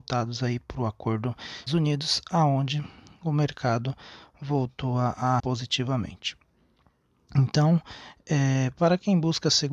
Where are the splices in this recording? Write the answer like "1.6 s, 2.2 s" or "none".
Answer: 1.7 s, 5.4 s